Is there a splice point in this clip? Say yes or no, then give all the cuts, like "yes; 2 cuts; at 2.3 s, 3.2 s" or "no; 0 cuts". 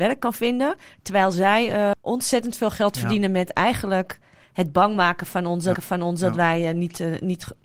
yes; 2 cuts; at 1.9 s, 5.7 s